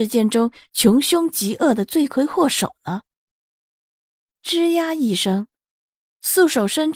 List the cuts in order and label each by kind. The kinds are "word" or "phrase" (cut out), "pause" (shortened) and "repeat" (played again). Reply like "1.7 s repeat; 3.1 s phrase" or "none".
none